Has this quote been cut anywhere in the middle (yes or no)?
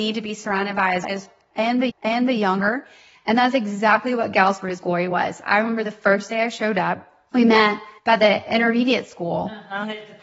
yes